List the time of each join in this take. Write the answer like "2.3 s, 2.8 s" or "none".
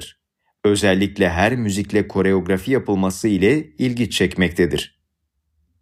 none